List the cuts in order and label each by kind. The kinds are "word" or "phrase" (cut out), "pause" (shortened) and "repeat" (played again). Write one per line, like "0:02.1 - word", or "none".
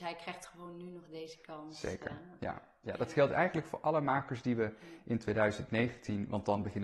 none